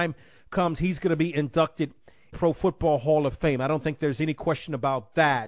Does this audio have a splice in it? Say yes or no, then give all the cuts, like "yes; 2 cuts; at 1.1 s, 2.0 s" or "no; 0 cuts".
yes; 1 cut; at 2.3 s